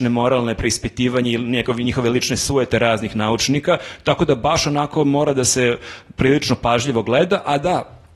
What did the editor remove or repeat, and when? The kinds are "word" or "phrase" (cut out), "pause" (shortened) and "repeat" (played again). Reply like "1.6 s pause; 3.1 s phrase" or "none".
none